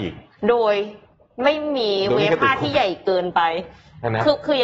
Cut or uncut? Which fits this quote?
uncut